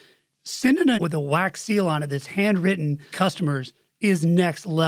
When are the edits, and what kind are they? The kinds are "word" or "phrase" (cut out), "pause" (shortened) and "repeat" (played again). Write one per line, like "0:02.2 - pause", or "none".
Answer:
0:01.0 - word
0:03.1 - word